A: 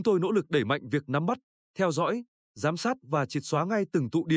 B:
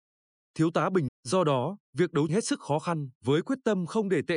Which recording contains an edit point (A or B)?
B